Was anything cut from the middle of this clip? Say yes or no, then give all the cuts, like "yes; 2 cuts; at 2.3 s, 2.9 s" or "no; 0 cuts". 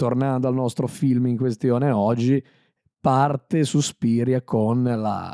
no; 0 cuts